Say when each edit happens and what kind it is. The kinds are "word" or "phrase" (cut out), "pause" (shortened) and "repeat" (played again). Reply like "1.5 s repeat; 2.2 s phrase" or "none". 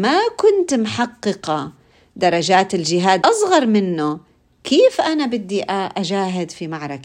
3.2 s word

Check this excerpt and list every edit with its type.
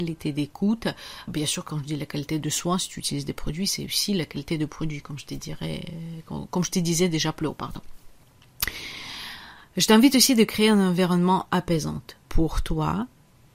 1.3 s word; 12.2 s pause

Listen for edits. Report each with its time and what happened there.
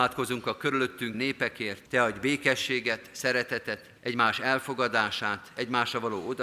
1.1 s word; 1.9 s pause; 4.0 s pause

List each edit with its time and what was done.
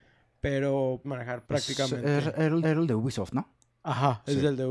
1.0 s word; 1.5 s phrase; 2.6 s repeat

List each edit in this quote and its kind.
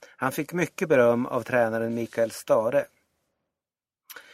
none

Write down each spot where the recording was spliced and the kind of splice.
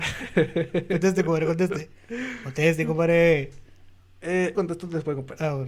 4.5 s word

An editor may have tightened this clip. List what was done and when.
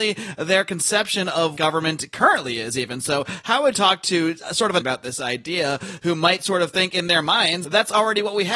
1.6 s word; 3.7 s word; 4.8 s phrase; 7.6 s word

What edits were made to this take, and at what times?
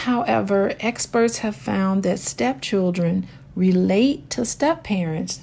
none

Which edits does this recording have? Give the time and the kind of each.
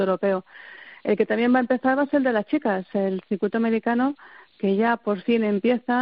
none

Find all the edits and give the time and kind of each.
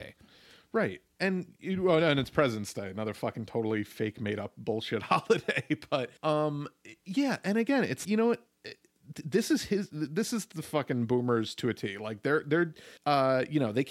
6.2 s pause; 8.0 s word; 13.0 s pause

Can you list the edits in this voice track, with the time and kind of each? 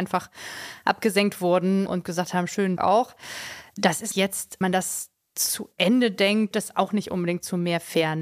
2.8 s word; 4.1 s word; 4.6 s word; 6.5 s word

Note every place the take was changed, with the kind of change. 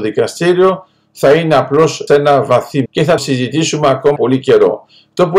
2.1 s word; 2.9 s word; 3.2 s word; 4.2 s word

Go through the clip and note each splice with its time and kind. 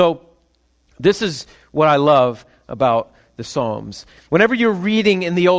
none

